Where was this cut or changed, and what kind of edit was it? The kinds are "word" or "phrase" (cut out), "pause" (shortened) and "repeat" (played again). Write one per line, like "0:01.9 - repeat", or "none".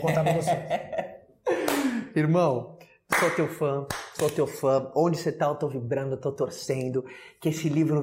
none

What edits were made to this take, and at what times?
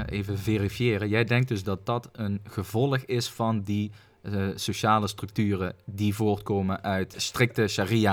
none

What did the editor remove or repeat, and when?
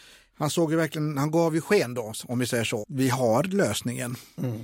0:02.8 - word

